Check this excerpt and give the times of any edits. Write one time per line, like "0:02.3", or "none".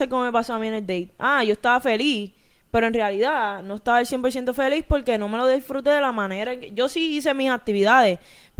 none